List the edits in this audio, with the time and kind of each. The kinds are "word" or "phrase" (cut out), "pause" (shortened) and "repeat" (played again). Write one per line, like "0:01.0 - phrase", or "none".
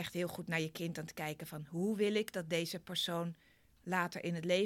none